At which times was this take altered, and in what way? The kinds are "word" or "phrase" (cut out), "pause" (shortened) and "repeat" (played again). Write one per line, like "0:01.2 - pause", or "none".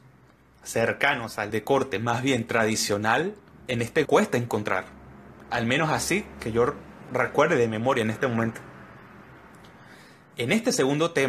0:01.5 - word
0:03.6 - pause
0:04.0 - word